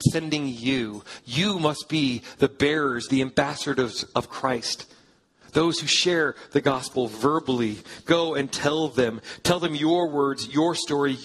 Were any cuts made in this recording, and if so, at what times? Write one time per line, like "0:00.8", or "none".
0:03.1